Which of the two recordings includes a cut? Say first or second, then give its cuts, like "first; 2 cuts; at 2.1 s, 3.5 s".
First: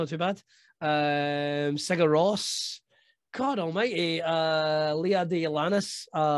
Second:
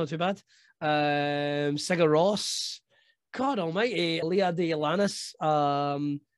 second; 1 cut; at 4.2 s